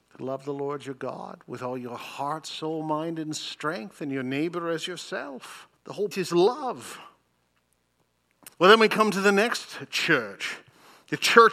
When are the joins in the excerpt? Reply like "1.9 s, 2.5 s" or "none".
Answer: 5.8 s, 6.1 s, 8.5 s

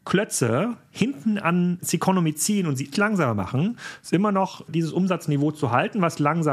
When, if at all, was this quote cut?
2.9 s

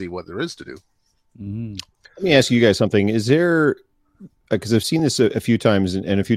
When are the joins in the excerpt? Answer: none

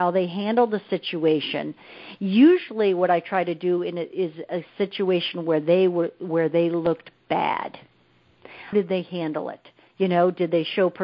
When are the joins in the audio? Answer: 8.7 s

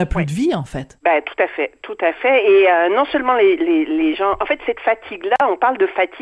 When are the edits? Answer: none

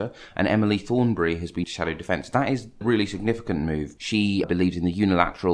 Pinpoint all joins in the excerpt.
1.6 s, 2.8 s, 4.0 s, 4.4 s

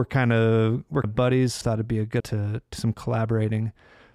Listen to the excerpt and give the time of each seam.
1.0 s, 1.6 s, 2.2 s, 2.7 s

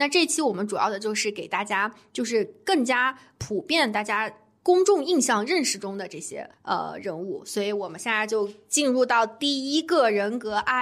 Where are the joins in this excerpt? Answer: 6.5 s

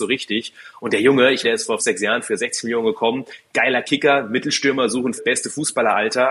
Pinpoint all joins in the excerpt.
1.4 s, 1.8 s, 5.2 s

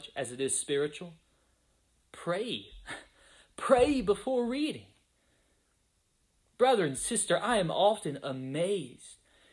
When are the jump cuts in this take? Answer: none

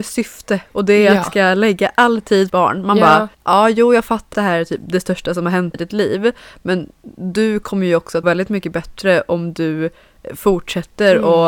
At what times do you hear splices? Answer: 1.2 s, 2.5 s, 3.3 s, 4.3 s, 5.7 s, 8.2 s

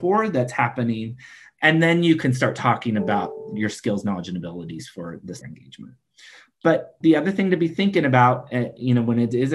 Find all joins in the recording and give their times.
5.4 s, 7.0 s

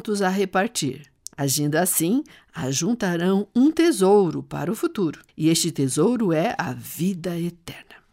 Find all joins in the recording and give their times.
1.3 s, 5.3 s

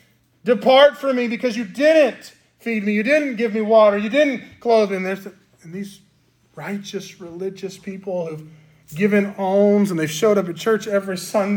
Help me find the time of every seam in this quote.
none

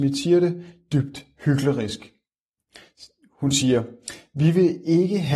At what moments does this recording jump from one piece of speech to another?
none

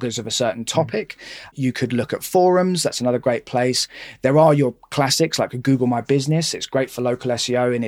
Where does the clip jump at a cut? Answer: none

